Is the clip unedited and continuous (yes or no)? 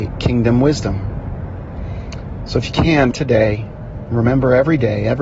no